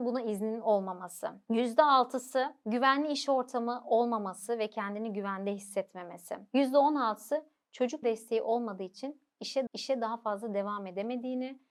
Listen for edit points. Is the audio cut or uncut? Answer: cut